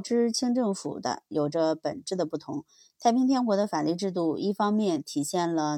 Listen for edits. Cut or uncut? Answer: uncut